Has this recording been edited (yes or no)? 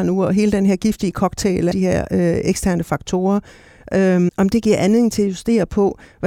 yes